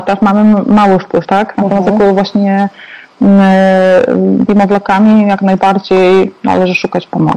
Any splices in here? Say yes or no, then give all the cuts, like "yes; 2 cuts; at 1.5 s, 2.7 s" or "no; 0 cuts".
yes; 2 cuts; at 1.2 s, 4.5 s